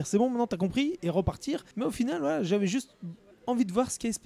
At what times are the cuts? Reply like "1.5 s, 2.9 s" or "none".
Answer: 1.7 s, 3.3 s